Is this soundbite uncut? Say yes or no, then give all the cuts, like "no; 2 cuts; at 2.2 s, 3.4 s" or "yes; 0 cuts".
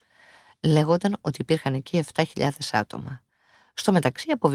yes; 0 cuts